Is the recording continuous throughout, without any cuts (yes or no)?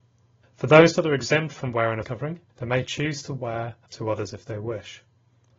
no